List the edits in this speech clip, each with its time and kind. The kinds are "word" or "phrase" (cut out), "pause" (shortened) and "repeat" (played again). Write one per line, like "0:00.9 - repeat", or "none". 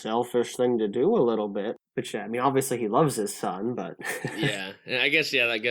none

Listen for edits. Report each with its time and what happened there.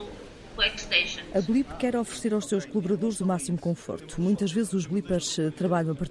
none

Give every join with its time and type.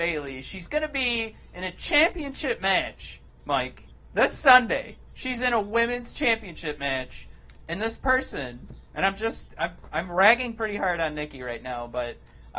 0:03.9 - pause

